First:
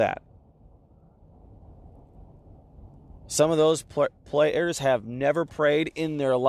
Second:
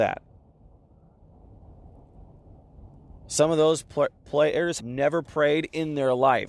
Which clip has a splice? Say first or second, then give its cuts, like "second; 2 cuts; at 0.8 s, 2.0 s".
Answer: second; 1 cut; at 4.8 s